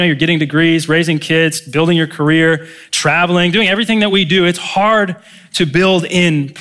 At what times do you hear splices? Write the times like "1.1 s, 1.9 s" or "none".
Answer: none